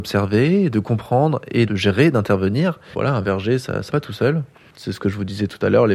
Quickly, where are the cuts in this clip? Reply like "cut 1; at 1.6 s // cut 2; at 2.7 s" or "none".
cut 1; at 1.7 s // cut 2; at 2.9 s // cut 3; at 3.9 s